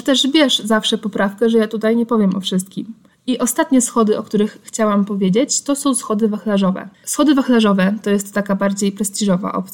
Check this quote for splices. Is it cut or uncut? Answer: cut